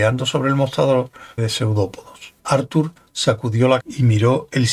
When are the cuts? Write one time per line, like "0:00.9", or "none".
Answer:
0:01.4
0:02.4
0:03.8